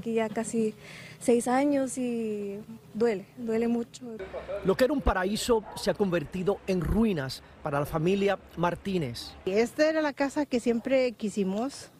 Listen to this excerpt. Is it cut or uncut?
cut